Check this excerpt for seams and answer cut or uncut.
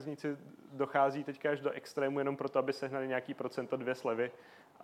uncut